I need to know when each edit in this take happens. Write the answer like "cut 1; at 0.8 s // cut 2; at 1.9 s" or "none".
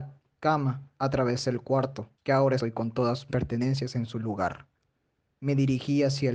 cut 1; at 0.9 s // cut 2; at 2.1 s // cut 3; at 2.6 s // cut 4; at 3.3 s